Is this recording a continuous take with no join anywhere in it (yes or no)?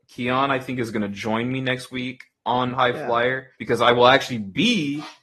no